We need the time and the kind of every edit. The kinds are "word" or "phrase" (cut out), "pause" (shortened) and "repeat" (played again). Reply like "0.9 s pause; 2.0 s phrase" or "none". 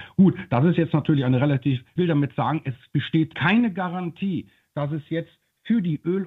2.0 s phrase